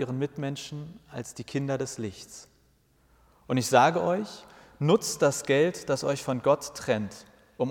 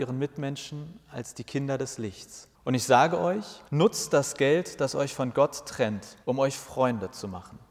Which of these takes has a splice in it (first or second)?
second